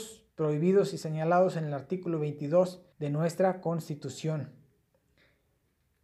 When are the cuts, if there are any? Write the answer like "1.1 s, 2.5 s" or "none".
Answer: 2.9 s